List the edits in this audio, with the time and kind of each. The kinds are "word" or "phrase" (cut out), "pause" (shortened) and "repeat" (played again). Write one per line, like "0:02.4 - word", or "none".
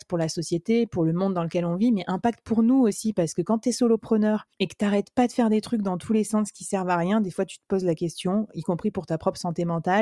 0:04.5 - pause